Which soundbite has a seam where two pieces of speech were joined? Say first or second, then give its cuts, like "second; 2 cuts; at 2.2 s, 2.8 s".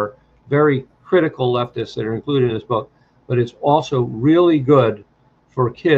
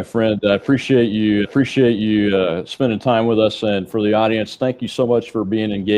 second; 1 cut; at 1.4 s